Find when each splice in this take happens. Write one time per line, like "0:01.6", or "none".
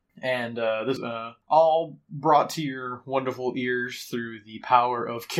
0:01.0
0:01.4